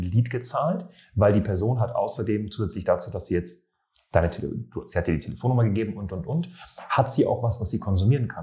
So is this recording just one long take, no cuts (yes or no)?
yes